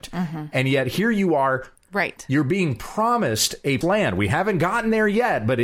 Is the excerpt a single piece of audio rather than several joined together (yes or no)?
no